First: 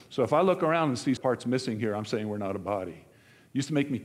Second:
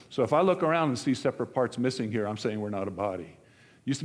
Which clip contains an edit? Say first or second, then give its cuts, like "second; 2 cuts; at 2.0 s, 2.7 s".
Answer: first; 1 cut; at 1.2 s